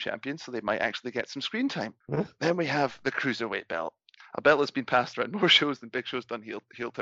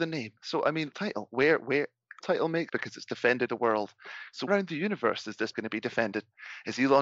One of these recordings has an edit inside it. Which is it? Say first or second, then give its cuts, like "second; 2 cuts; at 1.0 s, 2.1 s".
second; 6 cuts; at 0.9 s, 2.2 s, 2.7 s, 3.5 s, 4.5 s, 5.5 s